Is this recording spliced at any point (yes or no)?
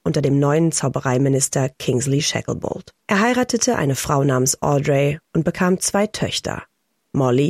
yes